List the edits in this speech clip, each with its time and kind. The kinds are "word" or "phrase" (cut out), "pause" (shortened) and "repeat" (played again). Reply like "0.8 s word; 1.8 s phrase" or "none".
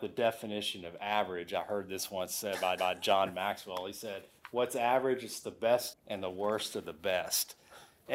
2.8 s repeat; 5.9 s phrase

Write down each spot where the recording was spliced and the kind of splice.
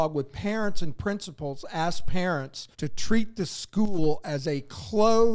2.7 s pause

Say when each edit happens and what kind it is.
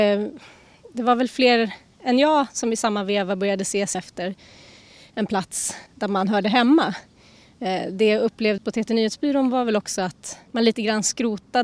3.9 s word; 5.9 s pause; 8.6 s word; 10.5 s pause

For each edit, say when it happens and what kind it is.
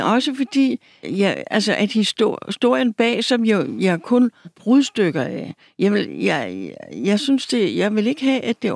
1.0 s word; 4.4 s word

